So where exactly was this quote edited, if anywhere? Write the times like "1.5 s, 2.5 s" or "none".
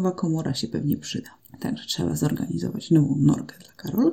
1.4 s